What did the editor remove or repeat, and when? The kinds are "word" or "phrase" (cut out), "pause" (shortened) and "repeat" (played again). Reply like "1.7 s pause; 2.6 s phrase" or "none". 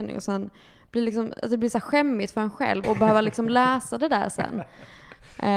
2.8 s word